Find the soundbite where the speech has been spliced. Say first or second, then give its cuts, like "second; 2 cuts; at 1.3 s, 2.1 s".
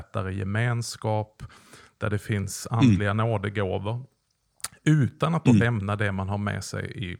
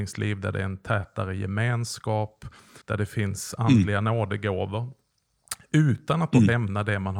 second; 1 cut; at 2.8 s